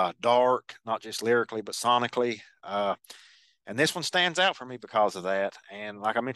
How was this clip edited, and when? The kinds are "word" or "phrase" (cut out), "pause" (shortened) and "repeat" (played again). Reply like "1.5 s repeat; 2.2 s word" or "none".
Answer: none